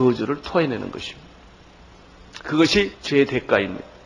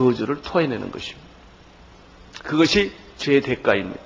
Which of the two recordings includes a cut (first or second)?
first